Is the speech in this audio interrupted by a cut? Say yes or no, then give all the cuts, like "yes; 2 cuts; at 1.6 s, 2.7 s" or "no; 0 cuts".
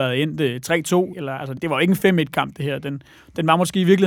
yes; 2 cuts; at 1.1 s, 1.6 s